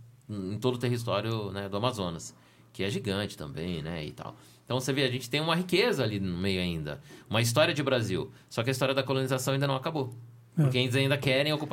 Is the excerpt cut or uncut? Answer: uncut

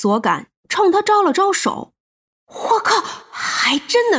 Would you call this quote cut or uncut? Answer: cut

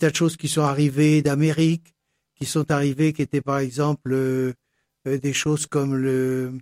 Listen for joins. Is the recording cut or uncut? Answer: uncut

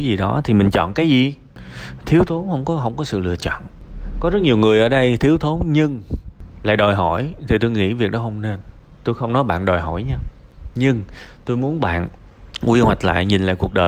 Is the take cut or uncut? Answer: uncut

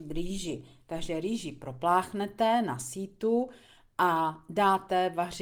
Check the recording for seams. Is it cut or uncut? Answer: uncut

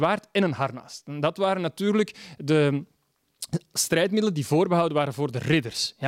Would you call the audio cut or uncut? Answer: uncut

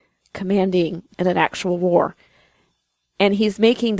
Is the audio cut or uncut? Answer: cut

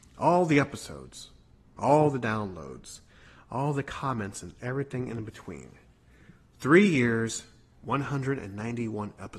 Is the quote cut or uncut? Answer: uncut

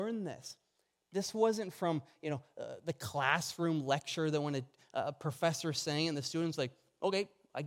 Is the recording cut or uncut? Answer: uncut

